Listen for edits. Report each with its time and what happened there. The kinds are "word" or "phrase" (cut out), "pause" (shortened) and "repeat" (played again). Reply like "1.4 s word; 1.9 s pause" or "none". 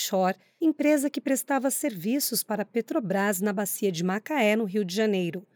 none